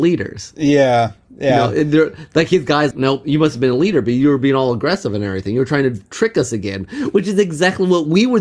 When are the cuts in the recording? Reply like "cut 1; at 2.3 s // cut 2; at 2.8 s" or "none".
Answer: cut 1; at 2.9 s

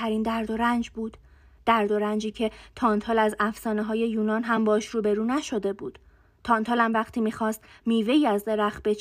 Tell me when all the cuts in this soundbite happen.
none

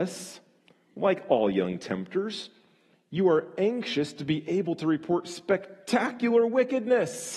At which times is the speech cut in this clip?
none

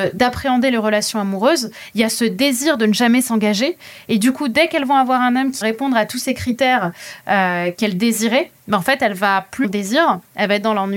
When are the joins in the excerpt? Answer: cut 1; at 5.6 s // cut 2; at 9.6 s

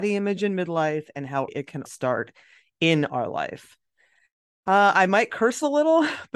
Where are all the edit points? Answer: cut 1; at 1.5 s // cut 2; at 1.9 s

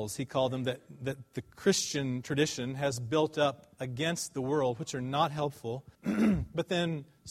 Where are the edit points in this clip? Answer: cut 1; at 5.9 s

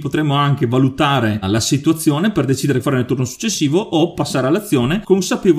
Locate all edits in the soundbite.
cut 1; at 1.4 s // cut 2; at 2.8 s

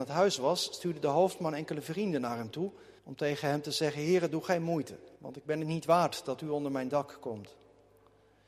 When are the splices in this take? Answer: cut 1; at 3.0 s // cut 2; at 5.2 s

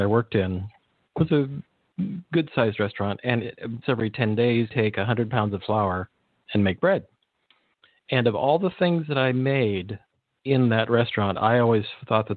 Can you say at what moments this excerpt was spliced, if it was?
cut 1; at 3.8 s // cut 2; at 4.7 s // cut 3; at 10.1 s

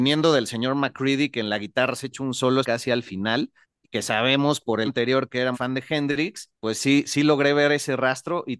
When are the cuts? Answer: cut 1; at 2.6 s // cut 2; at 3.6 s // cut 3; at 4.9 s // cut 4; at 5.5 s // cut 5; at 6.6 s

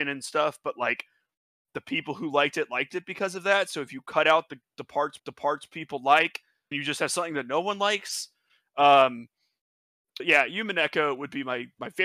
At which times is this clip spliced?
cut 1; at 5.2 s // cut 2; at 6.7 s // cut 3; at 10.2 s

